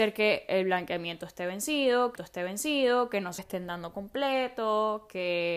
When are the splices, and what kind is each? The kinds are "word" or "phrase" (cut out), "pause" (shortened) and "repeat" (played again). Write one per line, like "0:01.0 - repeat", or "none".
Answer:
0:02.2 - repeat
0:03.4 - word